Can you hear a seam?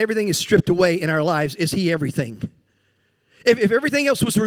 no; 0 cuts

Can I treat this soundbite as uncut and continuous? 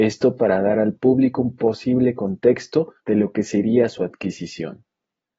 no; 1 cut; at 3.0 s

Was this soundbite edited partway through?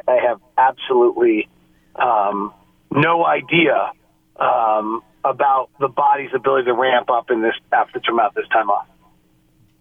no; 0 cuts

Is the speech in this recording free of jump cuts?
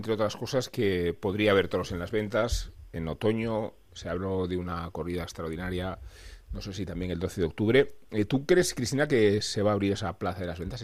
yes; 0 cuts

